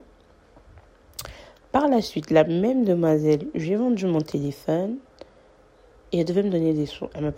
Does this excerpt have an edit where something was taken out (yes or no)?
no